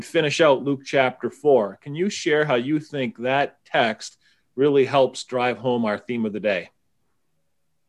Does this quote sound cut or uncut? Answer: uncut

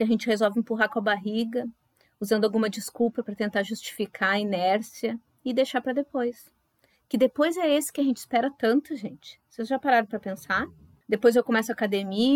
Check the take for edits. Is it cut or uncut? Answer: uncut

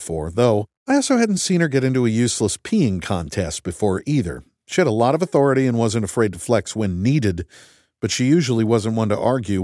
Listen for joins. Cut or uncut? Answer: uncut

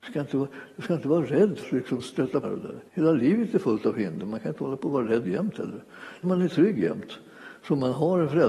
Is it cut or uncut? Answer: cut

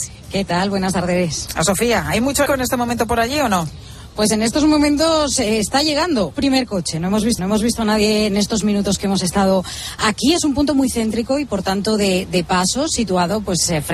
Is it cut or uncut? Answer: cut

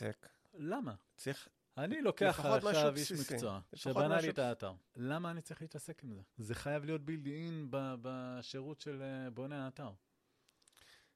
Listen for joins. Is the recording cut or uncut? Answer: cut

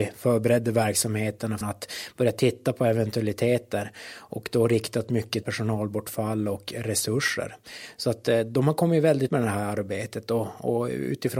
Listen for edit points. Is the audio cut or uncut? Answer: cut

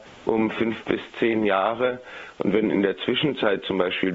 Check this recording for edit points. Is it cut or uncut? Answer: uncut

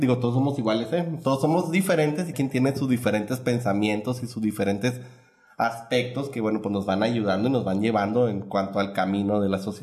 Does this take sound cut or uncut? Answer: cut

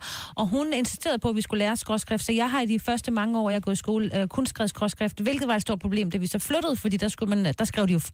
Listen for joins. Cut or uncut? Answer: uncut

